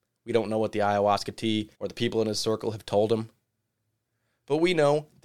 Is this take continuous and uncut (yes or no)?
no